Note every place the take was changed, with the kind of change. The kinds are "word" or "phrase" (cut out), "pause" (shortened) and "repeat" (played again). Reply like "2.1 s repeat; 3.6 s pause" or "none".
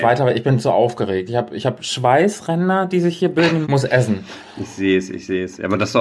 3.6 s word